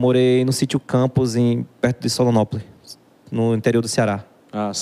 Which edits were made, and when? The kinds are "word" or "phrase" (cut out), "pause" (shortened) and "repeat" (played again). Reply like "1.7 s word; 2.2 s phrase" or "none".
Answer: none